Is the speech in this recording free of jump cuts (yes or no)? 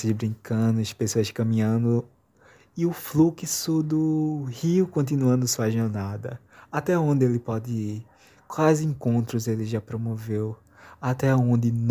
yes